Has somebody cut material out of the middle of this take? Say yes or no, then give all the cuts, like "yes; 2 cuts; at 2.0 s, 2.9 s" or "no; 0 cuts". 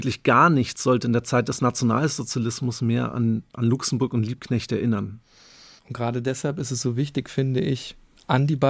no; 0 cuts